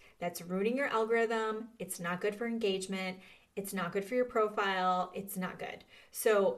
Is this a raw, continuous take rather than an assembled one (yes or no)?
yes